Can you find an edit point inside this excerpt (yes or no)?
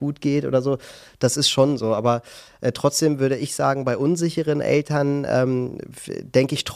no